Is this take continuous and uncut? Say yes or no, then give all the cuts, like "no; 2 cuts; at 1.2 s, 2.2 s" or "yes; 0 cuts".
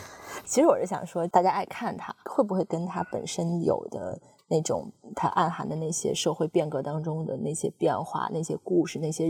yes; 0 cuts